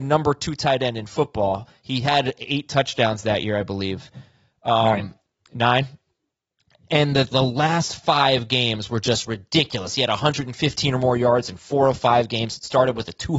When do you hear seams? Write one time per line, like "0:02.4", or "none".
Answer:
none